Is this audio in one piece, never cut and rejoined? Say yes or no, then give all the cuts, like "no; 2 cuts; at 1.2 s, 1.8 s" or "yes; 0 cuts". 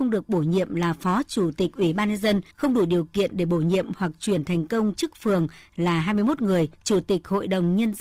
no; 2 cuts; at 2.5 s, 6.7 s